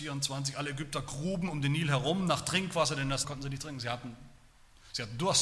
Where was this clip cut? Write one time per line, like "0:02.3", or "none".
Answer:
0:03.2

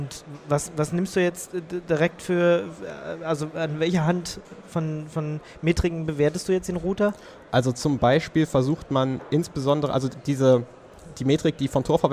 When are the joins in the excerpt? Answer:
none

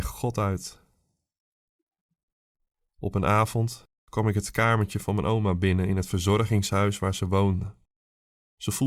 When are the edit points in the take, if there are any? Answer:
none

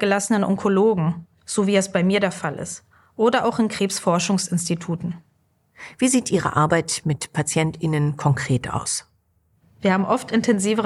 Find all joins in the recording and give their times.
none

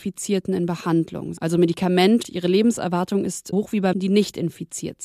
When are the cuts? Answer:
0:01.4
0:02.2
0:03.5
0:03.9

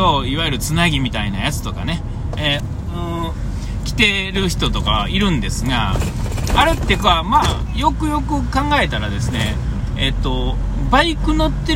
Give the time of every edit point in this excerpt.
0:02.6

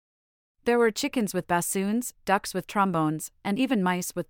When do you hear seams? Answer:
none

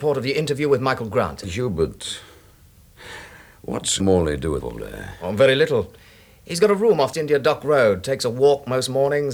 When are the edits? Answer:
0:04.0
0:04.6
0:07.1

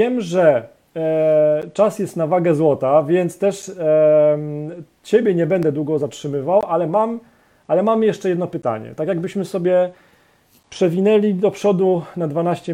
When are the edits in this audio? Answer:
none

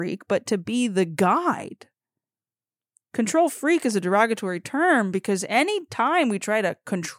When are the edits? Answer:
none

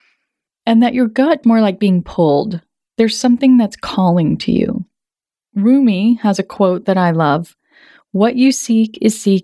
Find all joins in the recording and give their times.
0:01.4

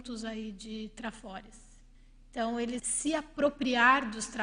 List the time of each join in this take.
0:01.9
0:02.8

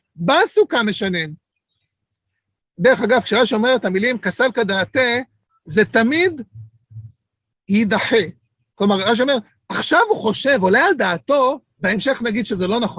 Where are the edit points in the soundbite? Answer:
none

